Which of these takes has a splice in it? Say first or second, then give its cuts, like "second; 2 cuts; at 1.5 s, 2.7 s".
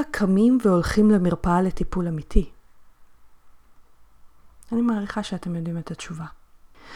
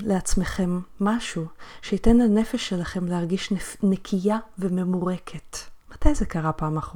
second; 1 cut; at 5.8 s